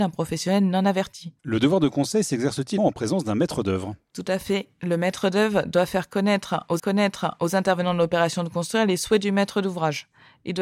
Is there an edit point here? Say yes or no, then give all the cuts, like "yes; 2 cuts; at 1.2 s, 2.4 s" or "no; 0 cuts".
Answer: yes; 3 cuts; at 1.4 s, 2.8 s, 6.8 s